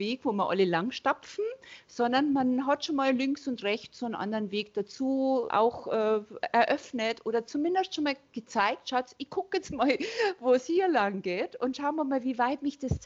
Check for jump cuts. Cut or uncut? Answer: cut